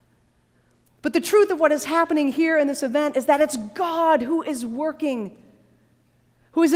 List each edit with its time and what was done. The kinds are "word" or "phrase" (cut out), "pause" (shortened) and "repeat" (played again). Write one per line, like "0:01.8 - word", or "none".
none